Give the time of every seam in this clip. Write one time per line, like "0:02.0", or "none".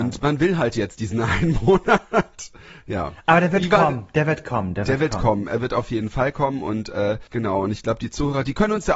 0:07.3